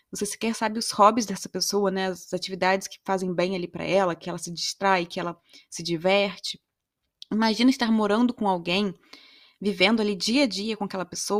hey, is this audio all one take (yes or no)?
yes